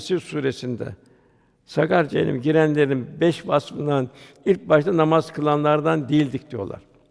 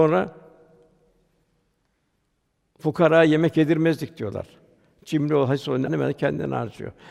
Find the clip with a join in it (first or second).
second